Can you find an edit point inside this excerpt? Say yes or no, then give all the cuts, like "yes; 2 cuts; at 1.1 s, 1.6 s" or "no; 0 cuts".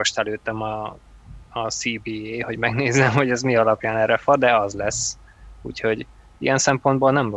no; 0 cuts